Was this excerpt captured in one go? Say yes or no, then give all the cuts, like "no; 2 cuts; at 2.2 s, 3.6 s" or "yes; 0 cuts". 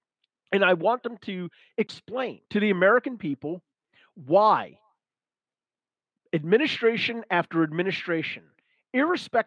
no; 1 cut; at 2.4 s